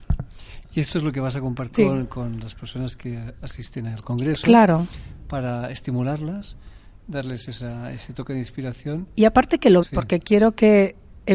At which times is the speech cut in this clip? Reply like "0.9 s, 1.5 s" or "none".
1.7 s, 9.8 s